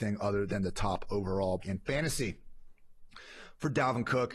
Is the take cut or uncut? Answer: cut